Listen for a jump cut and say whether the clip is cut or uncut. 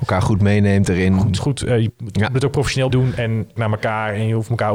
cut